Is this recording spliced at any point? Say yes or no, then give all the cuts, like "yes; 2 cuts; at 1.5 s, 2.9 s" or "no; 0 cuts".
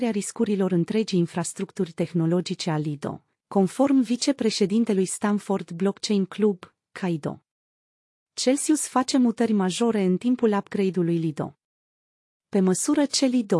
no; 0 cuts